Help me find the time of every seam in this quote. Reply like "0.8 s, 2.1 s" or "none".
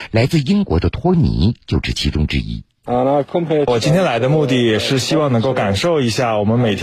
2.7 s